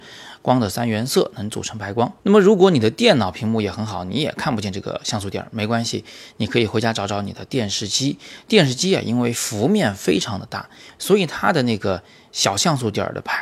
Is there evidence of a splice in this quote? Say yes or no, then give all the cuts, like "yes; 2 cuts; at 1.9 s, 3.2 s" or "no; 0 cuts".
yes; 1 cut; at 2.2 s